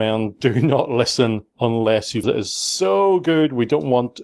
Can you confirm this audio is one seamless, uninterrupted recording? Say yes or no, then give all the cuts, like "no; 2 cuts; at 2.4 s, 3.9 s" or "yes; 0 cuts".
no; 1 cut; at 2.2 s